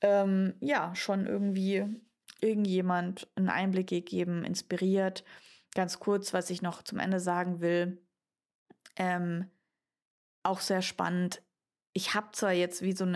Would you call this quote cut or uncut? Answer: uncut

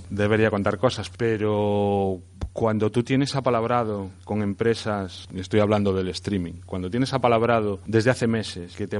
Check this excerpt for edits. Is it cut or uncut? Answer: cut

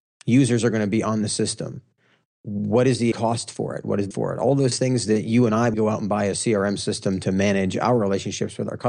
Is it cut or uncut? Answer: cut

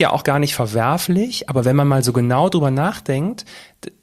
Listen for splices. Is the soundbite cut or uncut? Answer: uncut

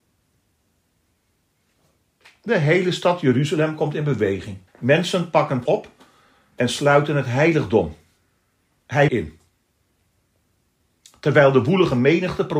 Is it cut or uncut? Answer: cut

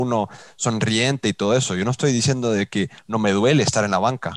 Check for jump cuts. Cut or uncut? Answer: uncut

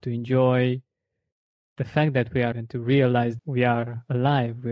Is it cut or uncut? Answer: cut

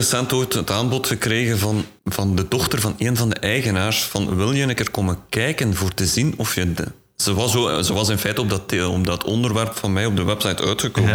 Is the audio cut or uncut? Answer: cut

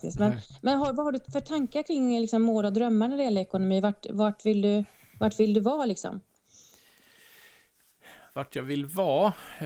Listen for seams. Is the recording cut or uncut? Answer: uncut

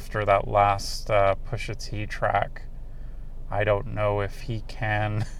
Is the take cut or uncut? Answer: uncut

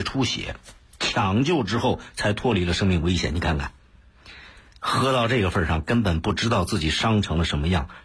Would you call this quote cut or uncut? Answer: uncut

